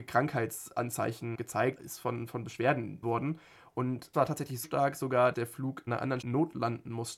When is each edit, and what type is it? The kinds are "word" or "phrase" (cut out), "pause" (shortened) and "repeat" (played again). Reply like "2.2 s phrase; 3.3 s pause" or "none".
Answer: 1.8 s word; 3.0 s word; 4.1 s word; 4.6 s word; 5.3 s word; 5.9 s word; 6.2 s word